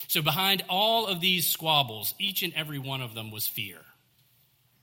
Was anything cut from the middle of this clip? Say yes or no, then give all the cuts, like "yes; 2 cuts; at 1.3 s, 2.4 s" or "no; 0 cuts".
no; 0 cuts